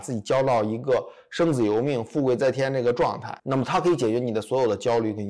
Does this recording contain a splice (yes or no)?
yes